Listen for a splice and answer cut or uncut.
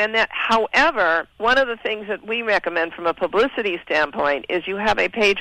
cut